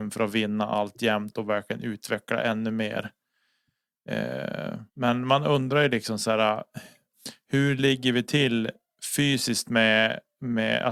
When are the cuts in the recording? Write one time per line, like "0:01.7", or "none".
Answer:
0:04.9